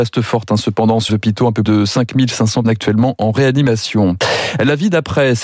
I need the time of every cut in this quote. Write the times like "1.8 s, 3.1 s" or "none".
1.1 s, 1.7 s, 2.6 s